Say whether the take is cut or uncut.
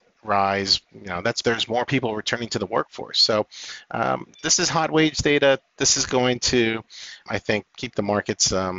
cut